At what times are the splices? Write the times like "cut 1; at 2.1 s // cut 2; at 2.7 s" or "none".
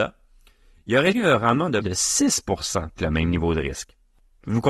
cut 1; at 1.1 s // cut 2; at 1.8 s // cut 3; at 3.0 s

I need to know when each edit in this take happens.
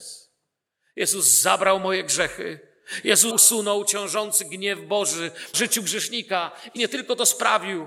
cut 1; at 3.3 s // cut 2; at 5.5 s // cut 3; at 6.8 s

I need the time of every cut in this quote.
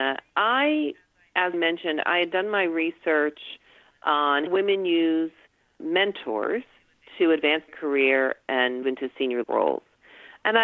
cut 1; at 1.5 s // cut 2; at 4.5 s // cut 3; at 5.8 s // cut 4; at 7.7 s // cut 5; at 8.8 s // cut 6; at 9.4 s

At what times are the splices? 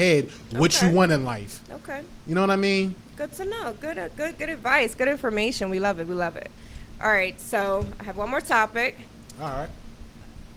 none

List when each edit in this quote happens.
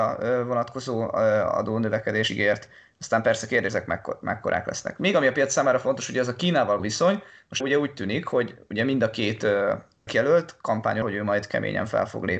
cut 1; at 2.3 s // cut 2; at 3.7 s // cut 3; at 6.8 s // cut 4; at 7.6 s // cut 5; at 10.1 s // cut 6; at 11.0 s

